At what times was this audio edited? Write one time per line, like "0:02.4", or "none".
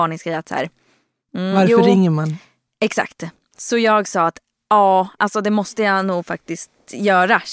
none